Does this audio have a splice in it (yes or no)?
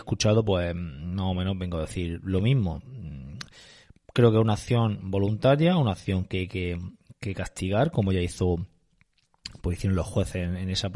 no